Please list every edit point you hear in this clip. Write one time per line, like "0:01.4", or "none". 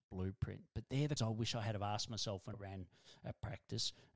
0:01.2
0:02.5